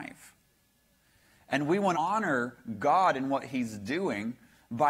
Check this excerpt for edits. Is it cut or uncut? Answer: cut